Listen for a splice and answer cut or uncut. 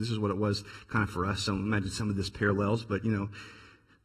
uncut